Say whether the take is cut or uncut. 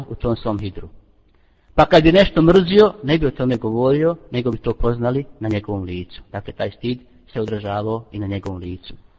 uncut